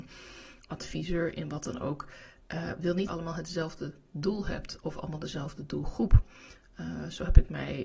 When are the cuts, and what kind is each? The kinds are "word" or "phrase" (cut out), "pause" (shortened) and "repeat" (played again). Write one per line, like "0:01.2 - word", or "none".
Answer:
0:03.1 - phrase